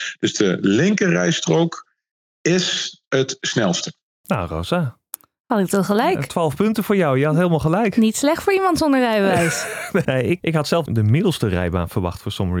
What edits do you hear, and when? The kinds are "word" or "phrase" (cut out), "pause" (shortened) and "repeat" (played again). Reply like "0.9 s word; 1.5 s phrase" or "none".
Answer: 10.0 s word; 10.4 s word; 10.9 s word

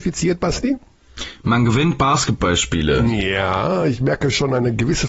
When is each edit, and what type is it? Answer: none

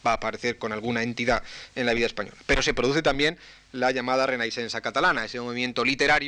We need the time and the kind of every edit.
none

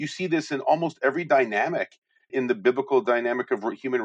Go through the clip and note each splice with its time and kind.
2.3 s word

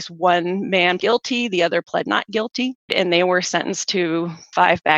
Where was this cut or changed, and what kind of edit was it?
1.0 s word; 2.8 s pause

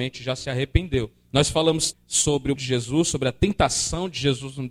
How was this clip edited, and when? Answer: 1.9 s word; 2.6 s word

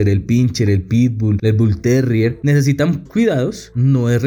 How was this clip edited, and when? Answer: 3.1 s word

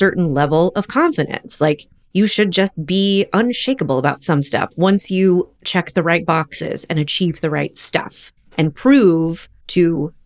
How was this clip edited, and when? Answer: none

